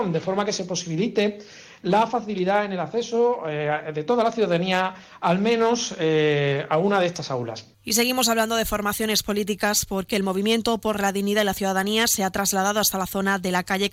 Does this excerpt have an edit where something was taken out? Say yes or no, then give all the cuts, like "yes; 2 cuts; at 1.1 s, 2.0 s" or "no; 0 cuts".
yes; 1 cut; at 7.7 s